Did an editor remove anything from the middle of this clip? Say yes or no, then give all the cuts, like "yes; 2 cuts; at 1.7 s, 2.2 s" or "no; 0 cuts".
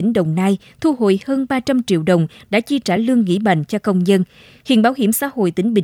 no; 0 cuts